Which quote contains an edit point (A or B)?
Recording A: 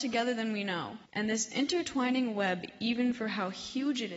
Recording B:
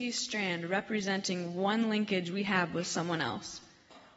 A